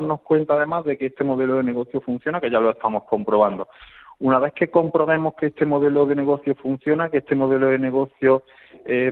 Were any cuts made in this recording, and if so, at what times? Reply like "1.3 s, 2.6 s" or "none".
none